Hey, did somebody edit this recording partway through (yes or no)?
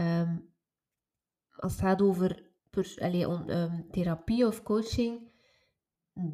yes